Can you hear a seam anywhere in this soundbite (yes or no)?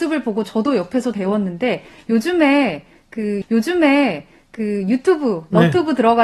yes